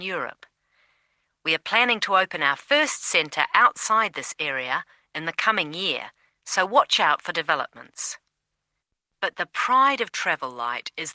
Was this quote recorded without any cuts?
yes; 0 cuts

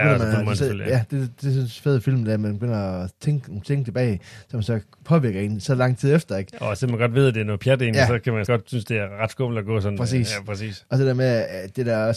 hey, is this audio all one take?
no; 1 cut; at 8.5 s

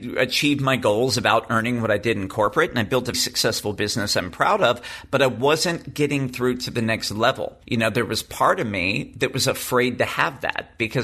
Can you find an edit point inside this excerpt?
yes; 1 cut; at 3.1 s

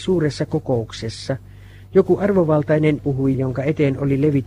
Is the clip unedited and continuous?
no; 2 cuts; at 3.0 s, 3.3 s

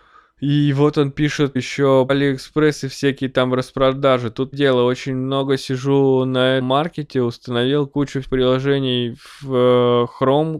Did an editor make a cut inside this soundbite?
yes; 5 cuts; at 1.6 s, 2.1 s, 4.5 s, 6.6 s, 8.2 s

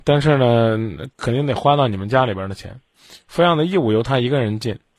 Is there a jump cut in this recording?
no; 0 cuts

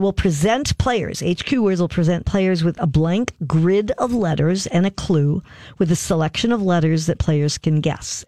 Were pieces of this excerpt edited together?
no; 0 cuts

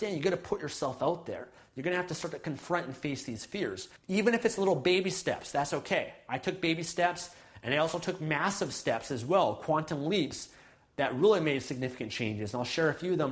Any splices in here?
yes; 1 cut; at 4.0 s

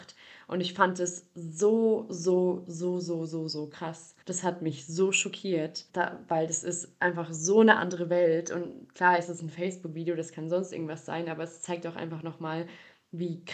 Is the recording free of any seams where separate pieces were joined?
no; 2 cuts; at 4.2 s, 5.9 s

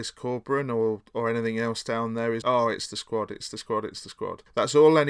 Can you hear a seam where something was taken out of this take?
yes; 1 cut; at 2.4 s

